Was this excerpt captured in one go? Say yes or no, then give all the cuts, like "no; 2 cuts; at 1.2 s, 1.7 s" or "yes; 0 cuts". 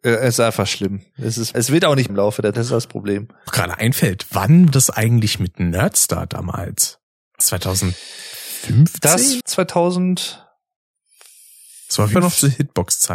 no; 8 cuts; at 1.5 s, 2.1 s, 2.5 s, 3.5 s, 4.7 s, 7.4 s, 9.4 s, 12.1 s